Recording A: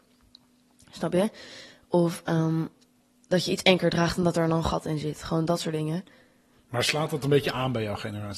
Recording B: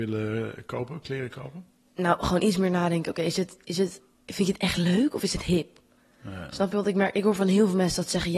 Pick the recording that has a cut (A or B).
B